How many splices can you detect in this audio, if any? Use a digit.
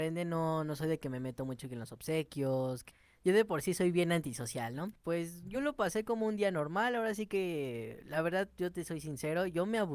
0